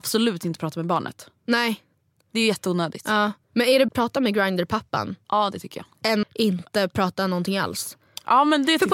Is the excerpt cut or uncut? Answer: cut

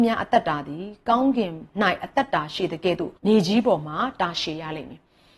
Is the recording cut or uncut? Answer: cut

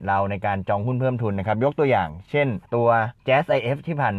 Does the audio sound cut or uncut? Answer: cut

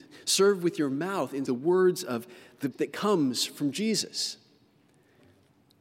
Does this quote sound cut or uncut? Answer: cut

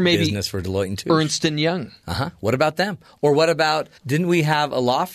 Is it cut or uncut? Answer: cut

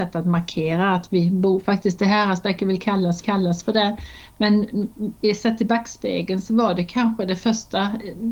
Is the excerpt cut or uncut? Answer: cut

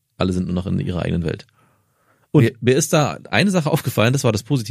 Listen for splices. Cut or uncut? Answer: uncut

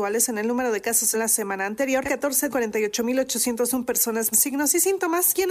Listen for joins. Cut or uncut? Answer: cut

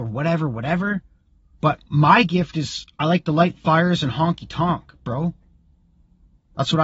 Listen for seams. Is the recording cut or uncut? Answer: uncut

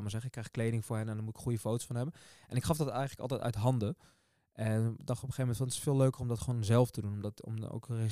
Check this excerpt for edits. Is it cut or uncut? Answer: uncut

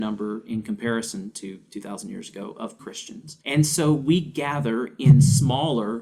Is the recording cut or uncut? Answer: cut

